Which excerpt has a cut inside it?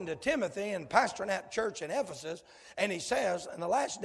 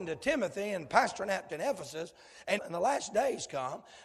second; 2 cuts; at 1.5 s, 2.6 s

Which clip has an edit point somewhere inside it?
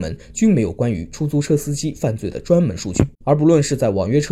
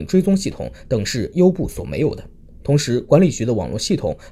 first; 1 cut; at 3.1 s

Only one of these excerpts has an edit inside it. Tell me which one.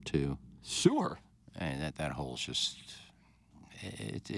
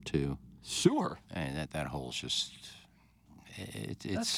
second; 1 cut; at 1.2 s

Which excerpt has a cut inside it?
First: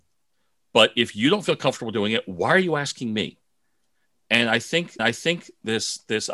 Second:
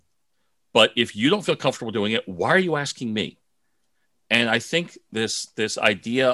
first; 1 cut; at 5.0 s

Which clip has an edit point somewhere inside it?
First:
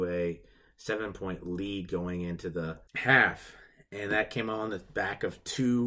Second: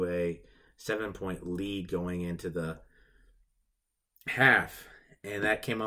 first; 1 cut; at 2.9 s

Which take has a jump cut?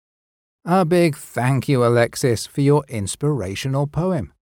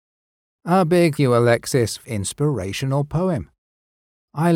second; 2 cuts; at 1.2 s, 2.0 s

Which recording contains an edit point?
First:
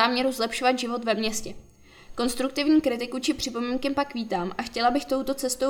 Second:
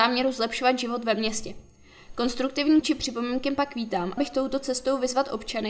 second; 2 cuts; at 2.8 s, 4.2 s

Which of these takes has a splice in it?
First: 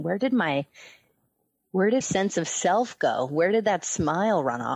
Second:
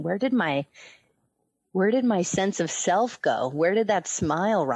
first; 1 cut; at 2.0 s

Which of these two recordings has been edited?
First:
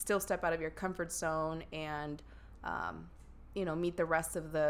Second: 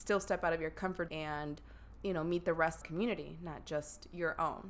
second; 3 cuts; at 1.1 s, 2.0 s, 2.8 s

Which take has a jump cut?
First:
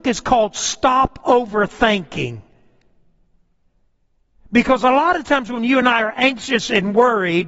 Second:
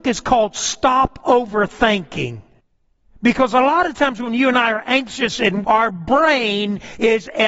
second; 2 cuts; at 2.6 s, 5.6 s

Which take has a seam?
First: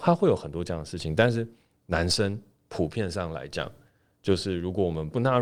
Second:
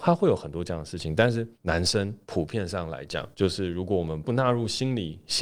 second; 3 cuts; at 1.5 s, 2.2 s, 3.3 s

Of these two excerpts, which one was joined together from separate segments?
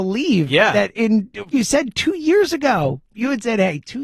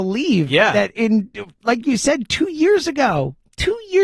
first; 2 cuts; at 1.5 s, 3.1 s

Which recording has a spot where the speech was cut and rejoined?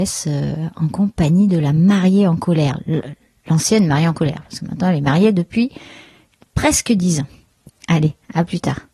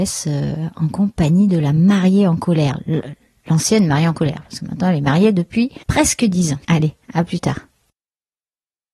second; 2 cuts; at 5.8 s, 6.6 s

